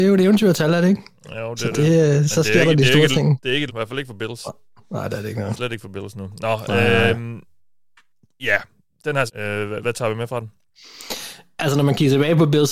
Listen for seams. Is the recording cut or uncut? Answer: cut